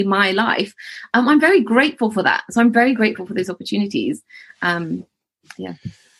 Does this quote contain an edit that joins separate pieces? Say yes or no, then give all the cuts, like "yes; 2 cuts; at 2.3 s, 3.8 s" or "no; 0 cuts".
no; 0 cuts